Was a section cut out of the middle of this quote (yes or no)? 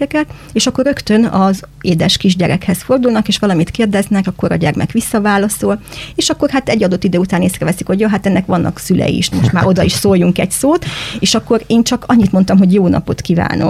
yes